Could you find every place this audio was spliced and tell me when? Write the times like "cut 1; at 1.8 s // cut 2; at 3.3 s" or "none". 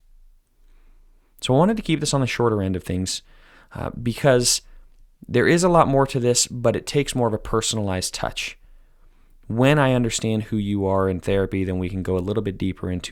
none